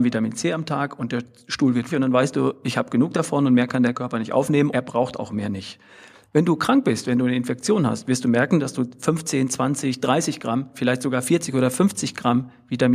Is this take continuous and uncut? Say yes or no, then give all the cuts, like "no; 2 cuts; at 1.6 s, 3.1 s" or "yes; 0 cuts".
no; 2 cuts; at 1.9 s, 4.7 s